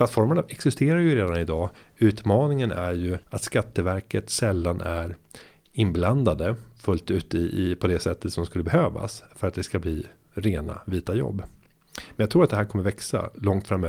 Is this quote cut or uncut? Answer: cut